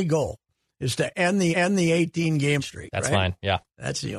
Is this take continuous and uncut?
no; 2 cuts; at 1.5 s, 2.6 s

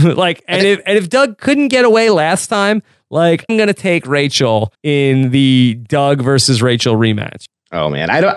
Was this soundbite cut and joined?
yes; 2 cuts; at 3.5 s, 4.7 s

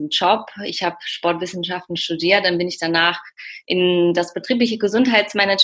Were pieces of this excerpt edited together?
no; 0 cuts

